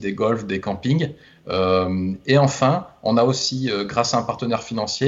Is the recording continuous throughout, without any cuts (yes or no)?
yes